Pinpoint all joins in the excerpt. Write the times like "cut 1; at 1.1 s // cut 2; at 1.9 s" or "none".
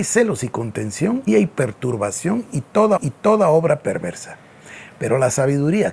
cut 1; at 1.3 s // cut 2; at 3.0 s